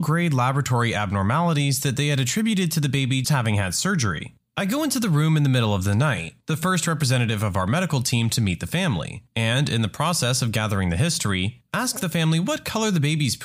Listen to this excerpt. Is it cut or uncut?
cut